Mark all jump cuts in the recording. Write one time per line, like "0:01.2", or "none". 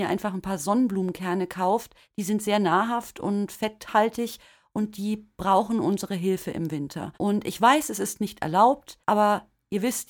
0:02.0
0:07.1
0:09.0